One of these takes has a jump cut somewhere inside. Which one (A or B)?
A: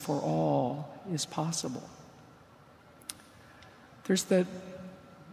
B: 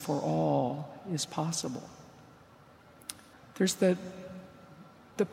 B